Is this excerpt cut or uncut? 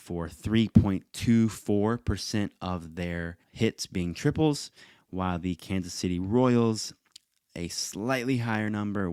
cut